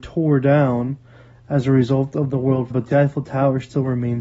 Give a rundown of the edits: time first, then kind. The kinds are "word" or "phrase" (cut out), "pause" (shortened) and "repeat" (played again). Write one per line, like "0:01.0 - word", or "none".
0:02.7 - word

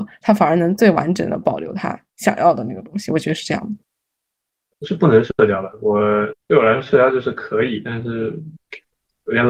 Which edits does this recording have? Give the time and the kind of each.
0:06.4 - pause

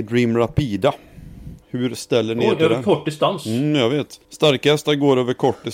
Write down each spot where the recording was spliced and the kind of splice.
0:01.6 - pause
0:04.2 - pause

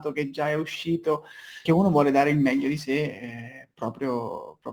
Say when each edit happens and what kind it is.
0:01.7 - word

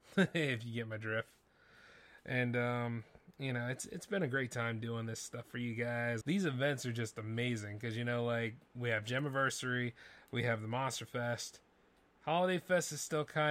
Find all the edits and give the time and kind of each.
0:06.2 - word

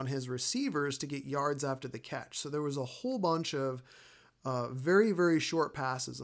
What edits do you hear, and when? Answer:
none

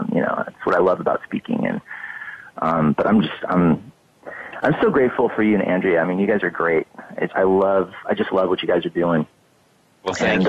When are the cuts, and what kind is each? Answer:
0:07.3 - word

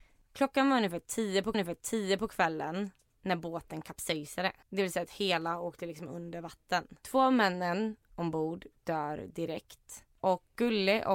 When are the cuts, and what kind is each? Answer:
0:01.5 - repeat
0:04.6 - pause

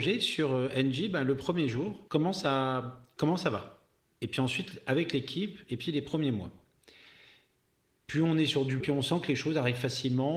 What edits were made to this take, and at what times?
0:02.1 - pause
0:08.8 - word

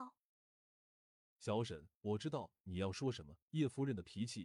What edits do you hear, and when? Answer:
0:01.9 - pause
0:03.4 - pause

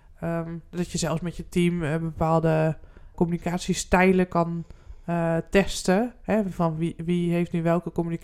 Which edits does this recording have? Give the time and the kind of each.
0:03.1 - word

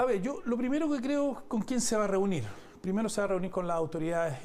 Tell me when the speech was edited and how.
none

